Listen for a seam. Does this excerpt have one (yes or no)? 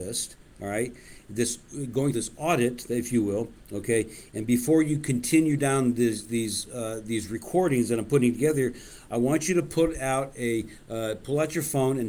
yes